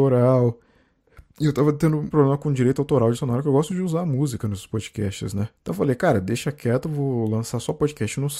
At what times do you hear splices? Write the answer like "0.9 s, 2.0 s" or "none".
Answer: 1.3 s, 2.1 s, 3.1 s, 3.7 s, 5.6 s